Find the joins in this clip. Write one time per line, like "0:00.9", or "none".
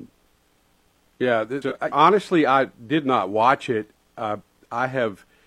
0:01.6
0:01.9